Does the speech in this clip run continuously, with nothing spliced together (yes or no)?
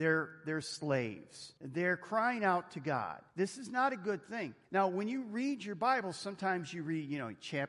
no